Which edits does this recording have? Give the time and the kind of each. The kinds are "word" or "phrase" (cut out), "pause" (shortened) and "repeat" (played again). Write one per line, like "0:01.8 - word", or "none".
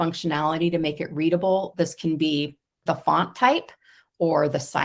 0:02.9 - word